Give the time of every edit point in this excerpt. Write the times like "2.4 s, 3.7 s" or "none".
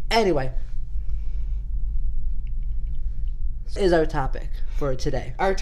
3.8 s